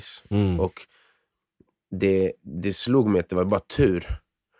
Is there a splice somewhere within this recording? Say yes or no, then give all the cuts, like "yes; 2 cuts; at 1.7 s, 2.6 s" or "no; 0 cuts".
no; 0 cuts